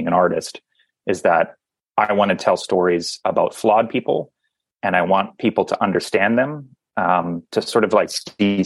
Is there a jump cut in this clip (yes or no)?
no